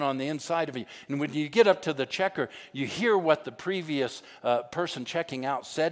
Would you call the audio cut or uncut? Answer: uncut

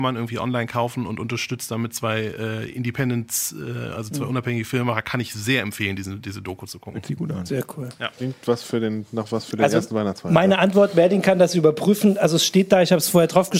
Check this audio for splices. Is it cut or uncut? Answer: uncut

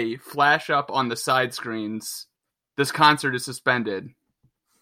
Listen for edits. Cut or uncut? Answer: cut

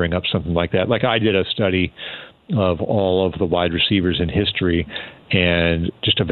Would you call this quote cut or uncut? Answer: uncut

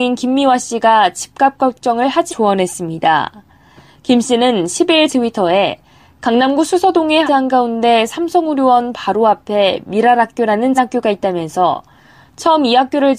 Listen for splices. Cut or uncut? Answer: cut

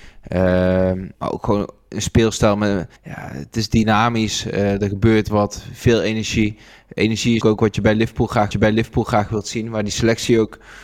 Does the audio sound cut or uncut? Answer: cut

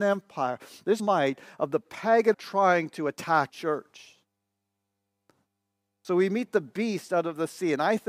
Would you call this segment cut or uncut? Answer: cut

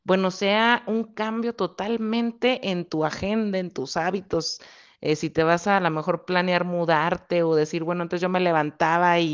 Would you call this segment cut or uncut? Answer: uncut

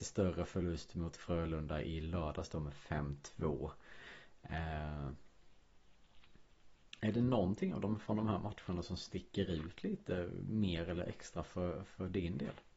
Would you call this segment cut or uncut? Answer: uncut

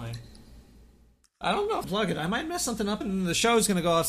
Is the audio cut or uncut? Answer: cut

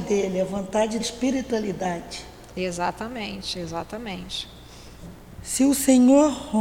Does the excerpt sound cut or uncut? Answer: cut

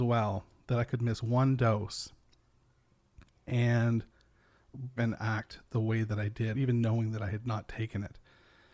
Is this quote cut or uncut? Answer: cut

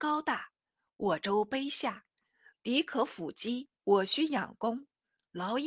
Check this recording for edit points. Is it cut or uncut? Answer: cut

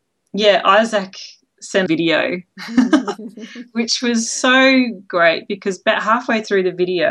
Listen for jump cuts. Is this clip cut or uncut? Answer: cut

